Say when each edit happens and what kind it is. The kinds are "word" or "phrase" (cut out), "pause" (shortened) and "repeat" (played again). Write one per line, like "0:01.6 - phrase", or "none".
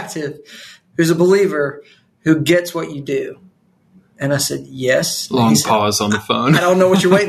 none